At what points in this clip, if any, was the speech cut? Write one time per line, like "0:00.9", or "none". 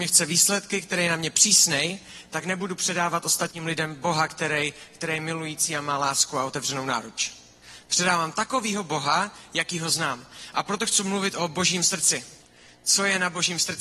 none